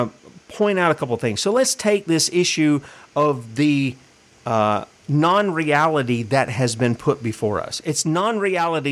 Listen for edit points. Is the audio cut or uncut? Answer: cut